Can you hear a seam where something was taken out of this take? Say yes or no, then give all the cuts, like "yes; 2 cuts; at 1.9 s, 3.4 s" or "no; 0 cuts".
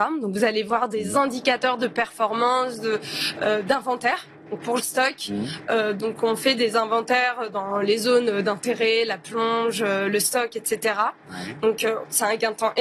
yes; 1 cut; at 4.8 s